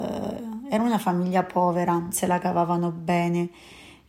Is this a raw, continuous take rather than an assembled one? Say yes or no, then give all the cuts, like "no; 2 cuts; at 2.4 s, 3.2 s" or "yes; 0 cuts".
no; 1 cut; at 2.1 s